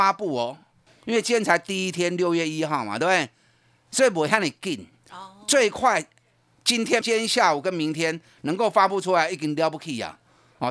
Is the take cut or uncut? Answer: cut